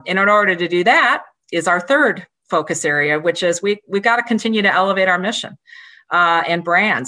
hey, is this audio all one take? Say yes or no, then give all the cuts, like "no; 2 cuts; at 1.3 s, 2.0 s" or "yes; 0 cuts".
yes; 0 cuts